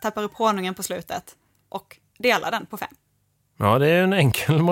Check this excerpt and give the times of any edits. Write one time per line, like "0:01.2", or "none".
none